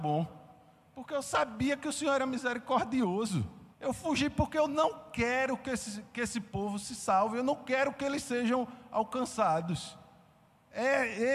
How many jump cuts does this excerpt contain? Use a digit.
1